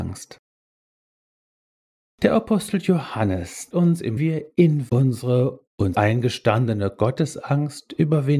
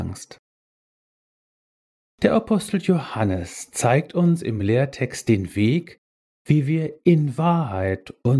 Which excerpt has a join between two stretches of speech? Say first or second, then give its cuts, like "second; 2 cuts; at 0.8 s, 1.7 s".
first; 4 cuts; at 3.7 s, 4.2 s, 4.9 s, 5.9 s